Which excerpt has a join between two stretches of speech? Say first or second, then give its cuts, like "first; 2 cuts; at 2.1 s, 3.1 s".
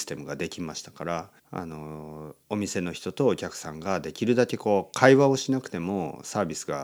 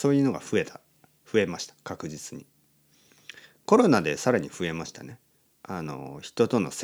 first; 2 cuts; at 1.4 s, 2.4 s